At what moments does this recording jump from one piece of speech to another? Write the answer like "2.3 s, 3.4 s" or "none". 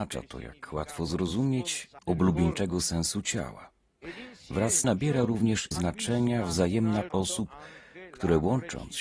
2.0 s, 4.8 s, 5.7 s, 7.1 s